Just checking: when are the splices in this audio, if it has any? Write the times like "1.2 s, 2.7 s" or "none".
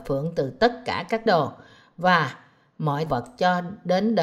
1.3 s, 3.1 s